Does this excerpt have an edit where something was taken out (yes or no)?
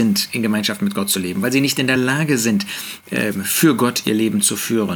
no